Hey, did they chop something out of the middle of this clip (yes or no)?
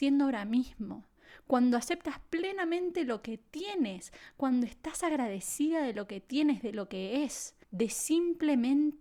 yes